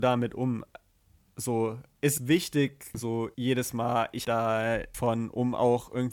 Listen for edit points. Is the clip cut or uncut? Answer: cut